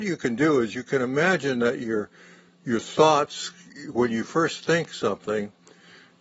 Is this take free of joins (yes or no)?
yes